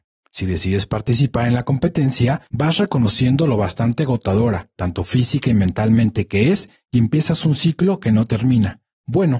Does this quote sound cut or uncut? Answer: uncut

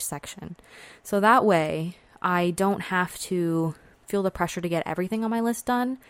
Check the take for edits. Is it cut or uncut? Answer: uncut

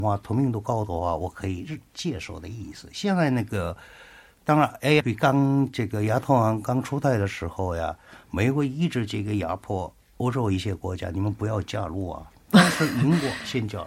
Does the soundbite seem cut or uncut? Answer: cut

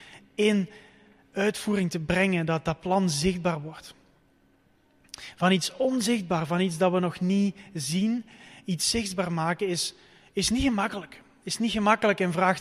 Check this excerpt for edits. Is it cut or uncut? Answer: uncut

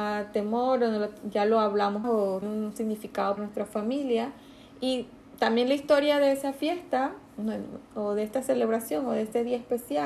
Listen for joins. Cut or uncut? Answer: cut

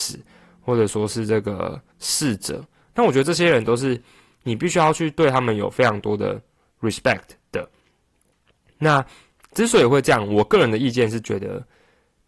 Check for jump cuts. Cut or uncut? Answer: cut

